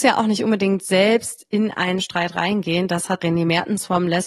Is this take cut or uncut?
cut